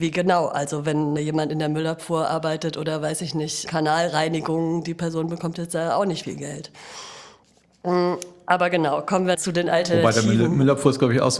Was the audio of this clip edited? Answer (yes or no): yes